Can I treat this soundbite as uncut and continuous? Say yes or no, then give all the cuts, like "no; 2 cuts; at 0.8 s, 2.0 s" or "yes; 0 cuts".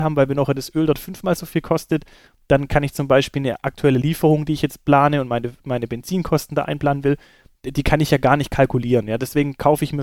yes; 0 cuts